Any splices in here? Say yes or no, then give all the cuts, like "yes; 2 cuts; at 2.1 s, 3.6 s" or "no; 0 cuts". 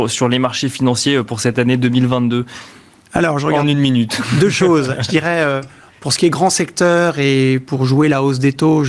no; 0 cuts